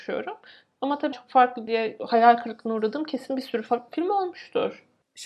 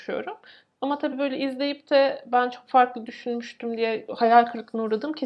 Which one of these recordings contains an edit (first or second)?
first